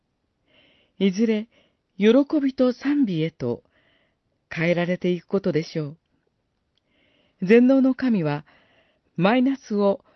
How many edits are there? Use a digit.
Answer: 0